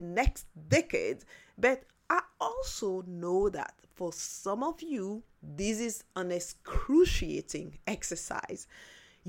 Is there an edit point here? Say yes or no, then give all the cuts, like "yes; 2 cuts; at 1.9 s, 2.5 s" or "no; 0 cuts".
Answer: yes; 1 cut; at 5.3 s